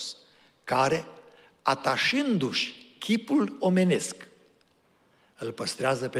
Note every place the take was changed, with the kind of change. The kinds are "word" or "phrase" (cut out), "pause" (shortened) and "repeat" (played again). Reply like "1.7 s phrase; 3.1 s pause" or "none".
none